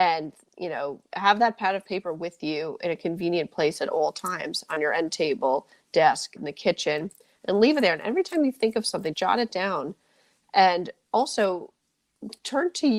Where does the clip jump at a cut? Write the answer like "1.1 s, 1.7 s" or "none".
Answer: 6.4 s, 9.1 s